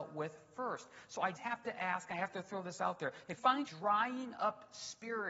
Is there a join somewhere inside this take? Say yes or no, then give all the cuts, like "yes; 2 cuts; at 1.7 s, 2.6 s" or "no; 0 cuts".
yes; 3 cuts; at 1.3 s, 3.4 s, 3.7 s